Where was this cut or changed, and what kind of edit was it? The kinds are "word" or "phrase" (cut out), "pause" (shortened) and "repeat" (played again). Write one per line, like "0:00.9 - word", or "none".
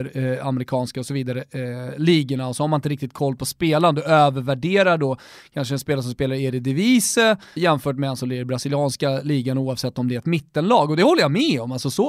0:07.6 - word